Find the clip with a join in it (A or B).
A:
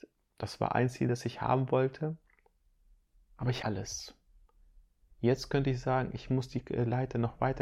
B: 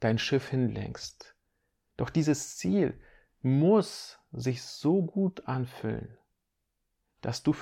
A